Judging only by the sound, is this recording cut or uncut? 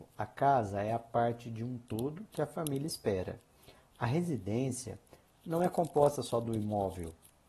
uncut